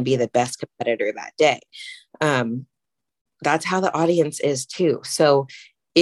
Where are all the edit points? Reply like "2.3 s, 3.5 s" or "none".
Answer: none